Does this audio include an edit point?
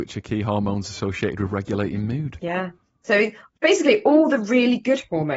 no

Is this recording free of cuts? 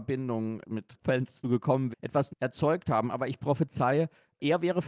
no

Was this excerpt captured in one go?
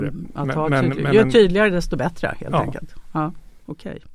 yes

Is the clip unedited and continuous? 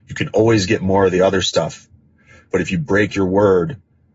yes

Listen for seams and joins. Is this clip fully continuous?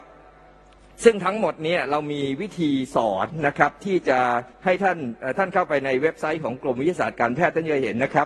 no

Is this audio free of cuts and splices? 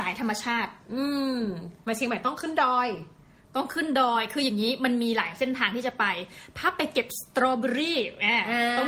no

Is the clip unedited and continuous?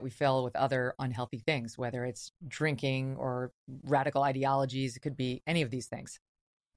yes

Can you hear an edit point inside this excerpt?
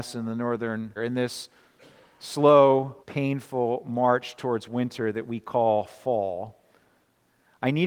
yes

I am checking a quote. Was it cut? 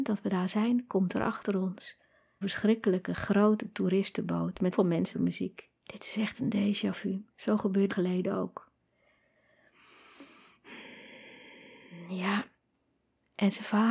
yes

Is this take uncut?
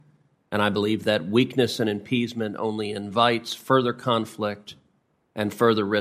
yes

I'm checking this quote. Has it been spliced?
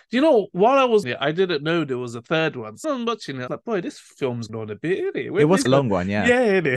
yes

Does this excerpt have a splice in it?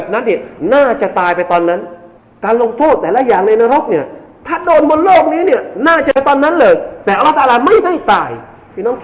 yes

